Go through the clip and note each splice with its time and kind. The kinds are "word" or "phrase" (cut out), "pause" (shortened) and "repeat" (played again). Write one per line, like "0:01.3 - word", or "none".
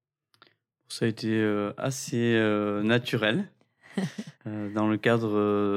0:04.3 - pause